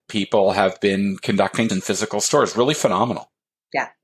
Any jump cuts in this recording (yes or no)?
yes